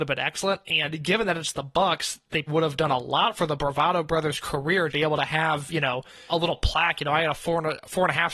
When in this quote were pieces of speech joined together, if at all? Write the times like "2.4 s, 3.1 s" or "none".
2.5 s, 4.9 s, 6.3 s